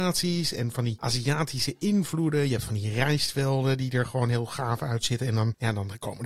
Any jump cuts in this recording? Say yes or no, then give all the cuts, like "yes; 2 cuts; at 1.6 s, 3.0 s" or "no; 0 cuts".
no; 0 cuts